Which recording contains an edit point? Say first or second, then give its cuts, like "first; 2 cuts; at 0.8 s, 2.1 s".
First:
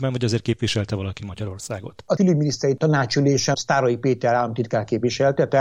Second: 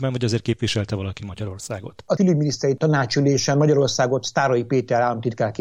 first; 1 cut; at 3.5 s